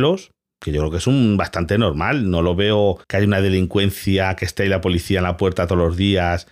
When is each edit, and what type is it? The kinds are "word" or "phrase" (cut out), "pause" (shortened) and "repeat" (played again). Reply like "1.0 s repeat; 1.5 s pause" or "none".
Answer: 3.0 s pause

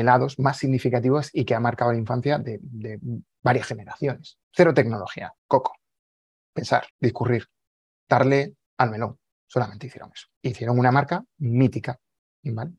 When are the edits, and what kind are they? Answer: 4.4 s pause; 5.4 s pause; 6.9 s pause; 8.7 s pause; 9.3 s pause; 10.3 s pause

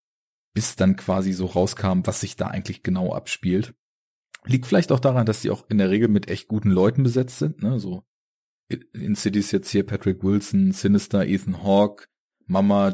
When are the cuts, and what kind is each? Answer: none

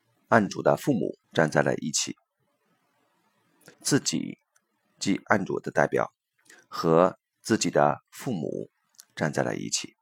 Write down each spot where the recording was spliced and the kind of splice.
1.2 s pause; 3.7 s pause

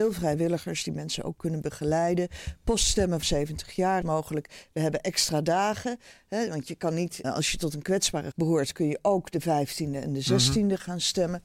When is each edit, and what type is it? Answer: 3.2 s word; 4.0 s word; 7.2 s word; 8.3 s word

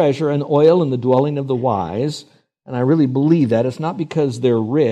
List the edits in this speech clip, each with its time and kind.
none

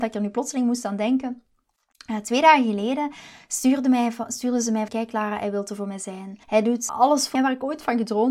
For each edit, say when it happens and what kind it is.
4.9 s word; 6.4 s pause; 6.9 s word; 7.3 s word

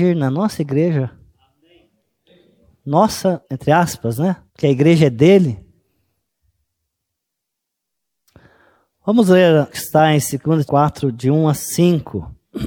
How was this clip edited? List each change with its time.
3.4 s pause; 4.5 s pause; 9.7 s phrase; 10.7 s word

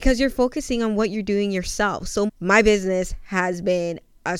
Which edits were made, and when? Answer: 2.3 s word

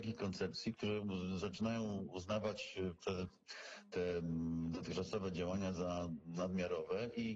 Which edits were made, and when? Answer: none

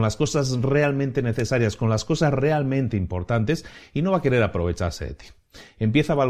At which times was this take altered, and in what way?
none

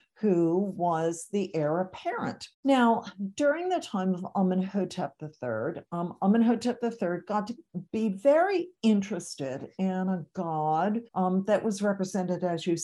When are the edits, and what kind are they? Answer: 2.5 s pause; 11.1 s pause

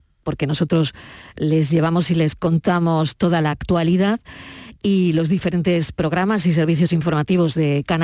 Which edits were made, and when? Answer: none

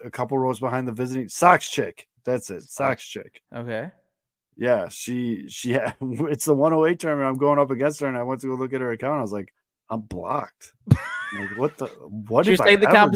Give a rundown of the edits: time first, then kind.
3.4 s pause; 9.6 s pause; 10.8 s pause

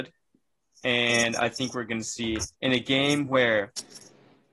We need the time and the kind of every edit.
2.5 s pause

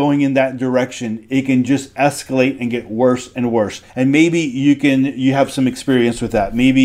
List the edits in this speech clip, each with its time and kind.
3.9 s pause

